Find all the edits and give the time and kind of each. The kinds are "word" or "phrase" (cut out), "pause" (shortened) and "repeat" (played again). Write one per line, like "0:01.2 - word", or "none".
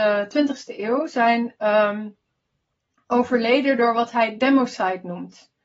none

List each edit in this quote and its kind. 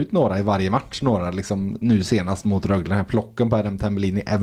none

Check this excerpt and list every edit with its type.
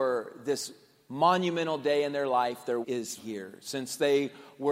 0:02.8 - phrase
0:03.2 - word

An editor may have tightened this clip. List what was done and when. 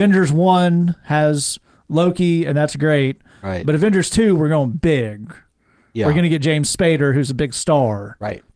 none

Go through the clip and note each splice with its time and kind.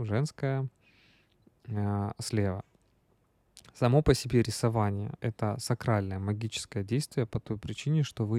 none

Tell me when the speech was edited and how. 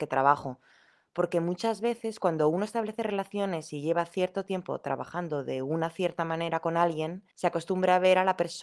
0:07.3 - pause

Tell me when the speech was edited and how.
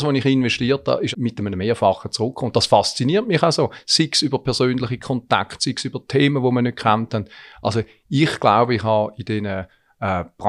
0:01.1 - word

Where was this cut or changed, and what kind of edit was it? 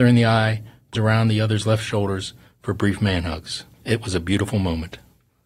0:00.9 - phrase
0:03.7 - pause

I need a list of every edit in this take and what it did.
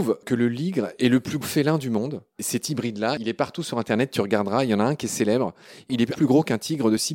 0:01.4 - word
0:06.1 - word

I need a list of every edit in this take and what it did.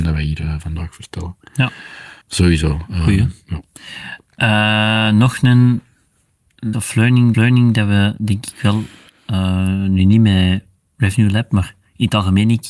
0:02.2 - pause
0:06.7 - word
0:07.3 - repeat

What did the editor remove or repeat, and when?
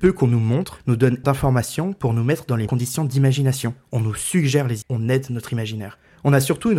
0:01.2 - word
0:02.7 - word
0:04.8 - word

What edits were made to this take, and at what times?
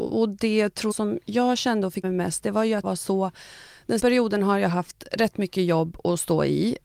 0:00.9 - word
0:02.0 - word
0:02.8 - word
0:04.0 - word

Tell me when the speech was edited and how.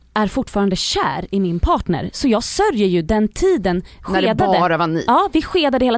0:04.0 - word

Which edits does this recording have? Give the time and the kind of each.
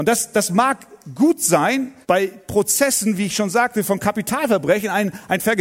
0:02.0 - pause

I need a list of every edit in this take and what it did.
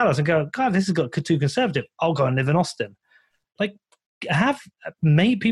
none

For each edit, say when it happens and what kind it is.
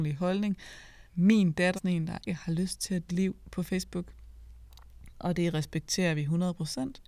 0:01.1 - pause
0:01.7 - word
0:02.3 - word
0:03.1 - phrase

